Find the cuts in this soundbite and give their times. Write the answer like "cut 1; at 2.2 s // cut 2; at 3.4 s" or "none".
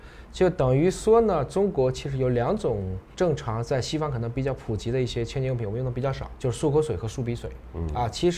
cut 1; at 6.4 s